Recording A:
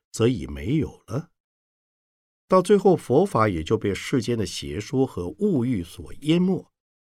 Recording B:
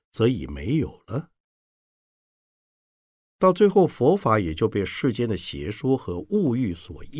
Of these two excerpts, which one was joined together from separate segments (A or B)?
A